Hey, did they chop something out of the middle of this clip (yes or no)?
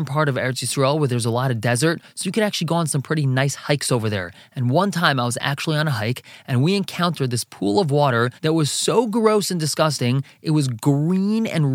yes